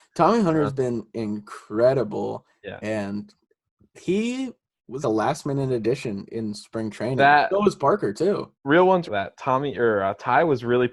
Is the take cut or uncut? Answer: cut